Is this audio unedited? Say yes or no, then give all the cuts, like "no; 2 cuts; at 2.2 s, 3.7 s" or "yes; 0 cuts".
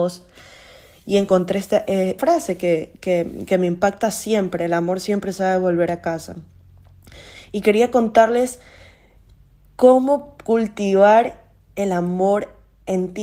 no; 1 cut; at 2.2 s